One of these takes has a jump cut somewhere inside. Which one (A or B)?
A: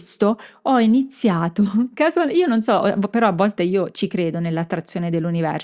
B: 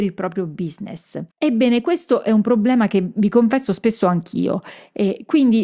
B